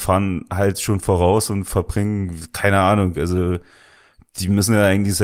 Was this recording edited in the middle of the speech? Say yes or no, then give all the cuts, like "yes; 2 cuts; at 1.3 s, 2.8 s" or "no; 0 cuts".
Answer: no; 0 cuts